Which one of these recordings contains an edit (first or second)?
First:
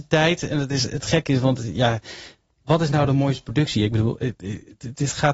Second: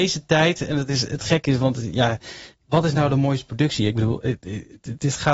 second